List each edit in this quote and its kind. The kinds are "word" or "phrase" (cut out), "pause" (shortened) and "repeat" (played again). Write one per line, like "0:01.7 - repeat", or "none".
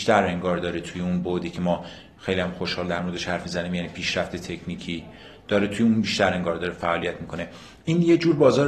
none